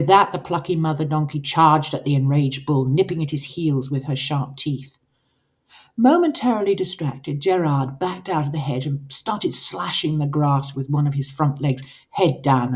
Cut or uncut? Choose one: uncut